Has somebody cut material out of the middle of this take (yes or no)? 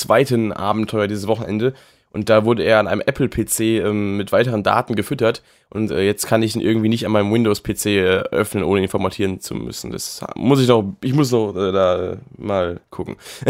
no